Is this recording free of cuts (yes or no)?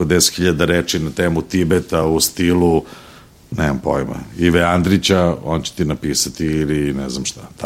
yes